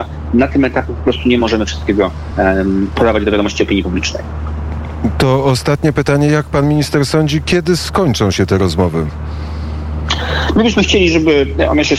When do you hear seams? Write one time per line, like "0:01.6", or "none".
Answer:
none

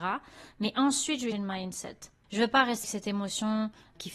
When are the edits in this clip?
0:01.3
0:02.8

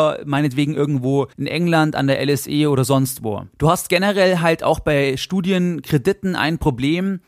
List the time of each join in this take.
0:01.3
0:03.5

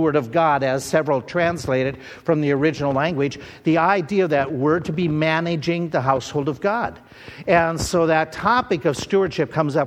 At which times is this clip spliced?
none

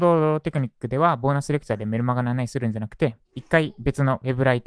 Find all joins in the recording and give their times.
0:03.2

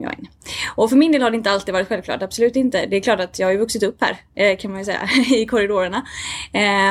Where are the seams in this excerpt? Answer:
none

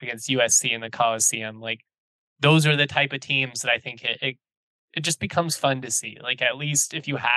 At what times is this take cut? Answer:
none

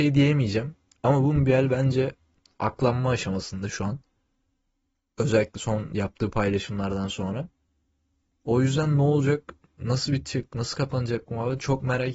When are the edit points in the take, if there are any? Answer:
none

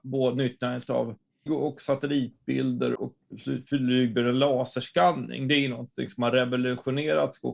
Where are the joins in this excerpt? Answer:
0:01.5
0:02.9

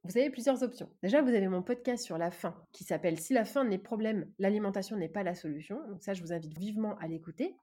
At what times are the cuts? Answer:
0:02.6
0:03.9
0:06.6

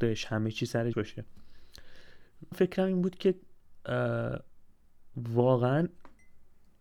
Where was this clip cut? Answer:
0:00.9
0:02.5

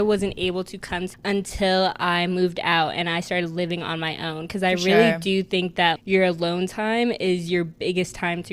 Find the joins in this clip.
0:01.1
0:06.0

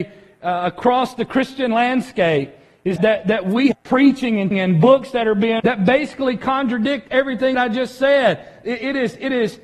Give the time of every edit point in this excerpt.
0:03.0
0:03.7
0:04.5
0:05.6
0:07.5

